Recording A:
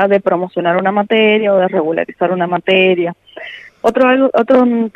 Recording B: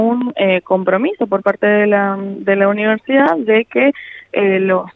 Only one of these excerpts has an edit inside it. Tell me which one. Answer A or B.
A